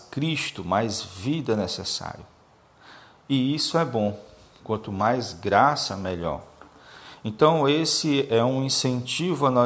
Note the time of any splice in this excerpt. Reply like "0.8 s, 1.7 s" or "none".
none